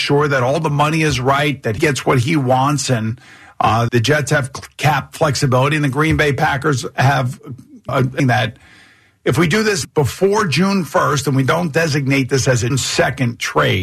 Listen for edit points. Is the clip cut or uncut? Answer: cut